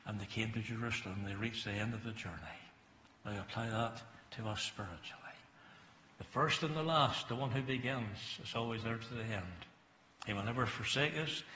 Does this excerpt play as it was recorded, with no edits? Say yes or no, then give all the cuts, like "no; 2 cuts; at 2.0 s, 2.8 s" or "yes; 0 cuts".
yes; 0 cuts